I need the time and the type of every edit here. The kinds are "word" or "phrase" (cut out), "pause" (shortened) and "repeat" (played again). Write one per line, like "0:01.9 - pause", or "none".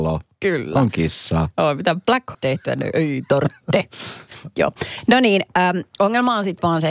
0:02.3 - phrase